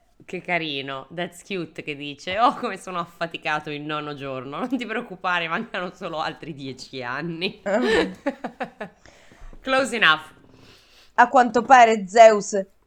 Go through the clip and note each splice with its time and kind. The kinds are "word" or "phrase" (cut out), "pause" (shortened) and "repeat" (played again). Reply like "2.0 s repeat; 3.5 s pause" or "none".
none